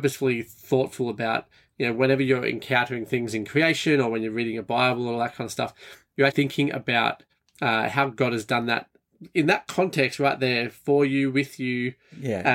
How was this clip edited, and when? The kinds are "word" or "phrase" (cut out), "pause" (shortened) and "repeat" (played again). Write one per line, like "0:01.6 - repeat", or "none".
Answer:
0:06.3 - word
0:07.3 - pause